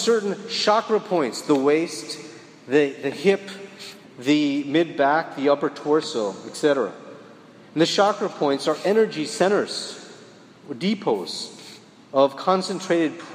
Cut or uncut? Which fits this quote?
uncut